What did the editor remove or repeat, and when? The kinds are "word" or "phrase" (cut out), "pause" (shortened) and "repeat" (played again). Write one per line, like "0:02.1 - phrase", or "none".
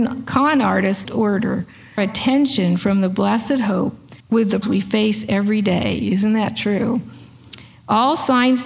0:01.0 - phrase
0:02.0 - phrase
0:04.2 - pause
0:04.6 - word